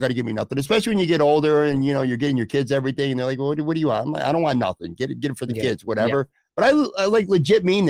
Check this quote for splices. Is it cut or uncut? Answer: uncut